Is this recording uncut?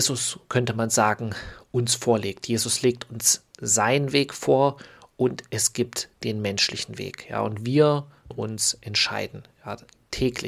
no; 1 cut; at 8.3 s

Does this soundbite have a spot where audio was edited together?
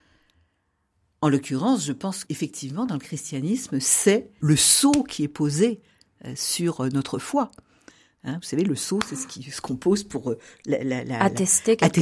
yes; 2 cuts; at 2.2 s, 4.4 s

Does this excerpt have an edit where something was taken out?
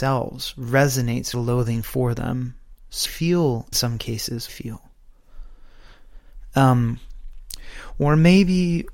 yes; 4 cuts; at 1.3 s, 3.1 s, 3.7 s, 4.5 s

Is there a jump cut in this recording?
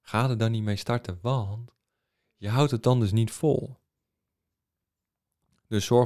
no; 0 cuts

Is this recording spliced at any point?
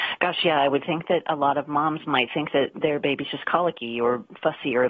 no; 0 cuts

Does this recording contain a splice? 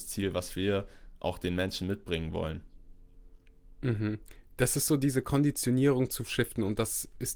no; 0 cuts

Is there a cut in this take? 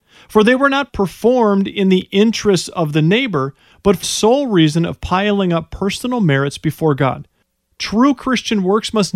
yes; 1 cut; at 4.0 s

